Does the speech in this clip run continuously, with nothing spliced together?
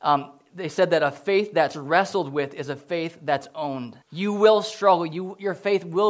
no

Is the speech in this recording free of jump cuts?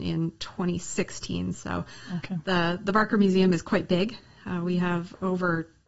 yes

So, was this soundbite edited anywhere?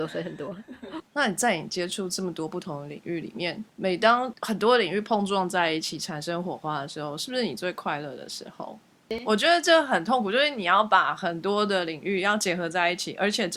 yes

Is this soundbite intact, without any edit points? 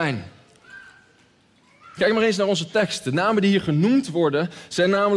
yes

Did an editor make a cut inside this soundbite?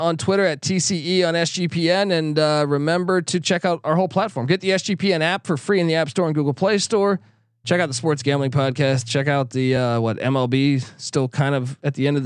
no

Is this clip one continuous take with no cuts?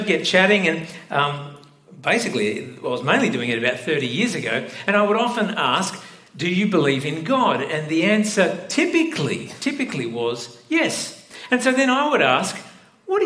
yes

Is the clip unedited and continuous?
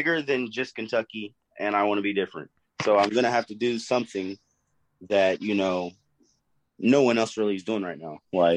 yes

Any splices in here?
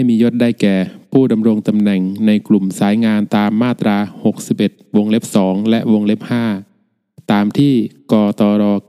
no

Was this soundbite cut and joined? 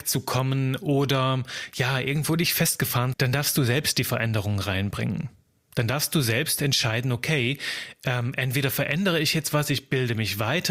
yes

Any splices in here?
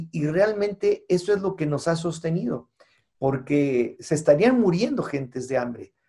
yes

